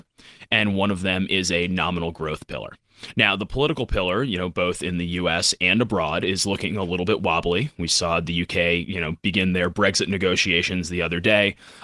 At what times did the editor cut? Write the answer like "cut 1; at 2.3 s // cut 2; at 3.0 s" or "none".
none